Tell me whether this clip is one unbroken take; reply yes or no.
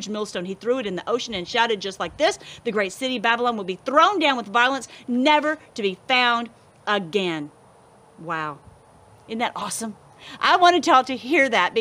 yes